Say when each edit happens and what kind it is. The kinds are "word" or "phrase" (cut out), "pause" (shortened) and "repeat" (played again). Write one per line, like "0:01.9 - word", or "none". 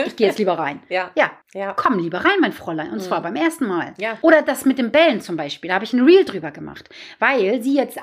0:01.4 - pause